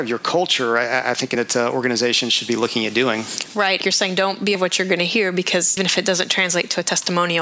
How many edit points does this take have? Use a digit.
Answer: 4